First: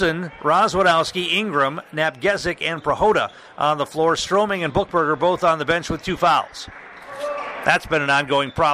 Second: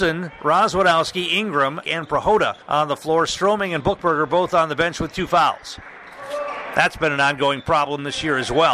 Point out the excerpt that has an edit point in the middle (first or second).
second